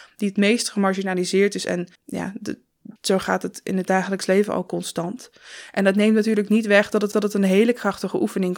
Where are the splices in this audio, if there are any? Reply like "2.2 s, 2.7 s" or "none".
2.0 s, 3.0 s, 7.1 s